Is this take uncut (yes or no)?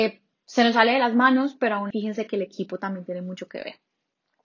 no